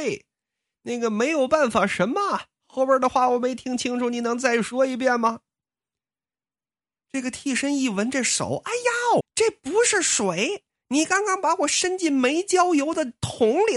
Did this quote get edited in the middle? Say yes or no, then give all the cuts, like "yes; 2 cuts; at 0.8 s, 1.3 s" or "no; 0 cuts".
yes; 1 cut; at 9.2 s